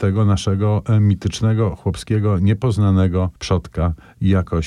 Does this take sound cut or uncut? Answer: cut